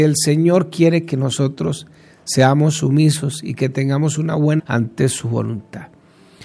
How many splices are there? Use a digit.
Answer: 1